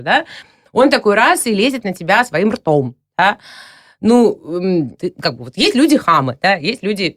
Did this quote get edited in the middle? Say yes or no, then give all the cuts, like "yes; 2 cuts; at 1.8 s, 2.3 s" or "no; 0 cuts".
yes; 1 cut; at 5.0 s